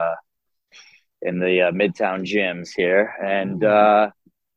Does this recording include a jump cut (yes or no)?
no